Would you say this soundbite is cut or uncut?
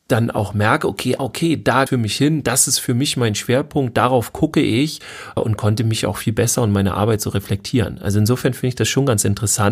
cut